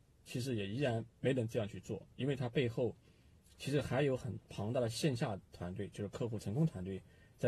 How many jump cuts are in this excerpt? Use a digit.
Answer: 2